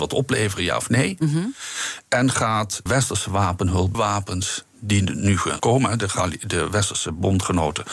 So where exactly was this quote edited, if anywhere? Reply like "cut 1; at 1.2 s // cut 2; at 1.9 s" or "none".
cut 1; at 2.9 s // cut 2; at 3.9 s // cut 3; at 5.6 s